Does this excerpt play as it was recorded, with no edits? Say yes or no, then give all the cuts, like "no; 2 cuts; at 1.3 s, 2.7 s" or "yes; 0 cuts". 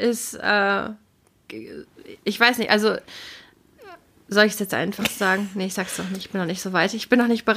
yes; 0 cuts